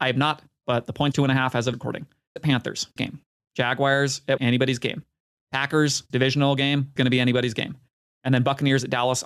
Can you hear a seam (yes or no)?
yes